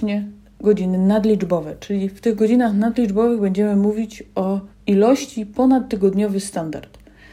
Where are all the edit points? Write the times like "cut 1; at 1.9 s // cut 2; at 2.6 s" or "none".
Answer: cut 1; at 4.7 s